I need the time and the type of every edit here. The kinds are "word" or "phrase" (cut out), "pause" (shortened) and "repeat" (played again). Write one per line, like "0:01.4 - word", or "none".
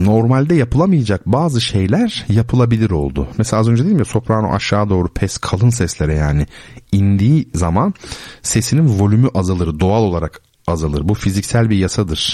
none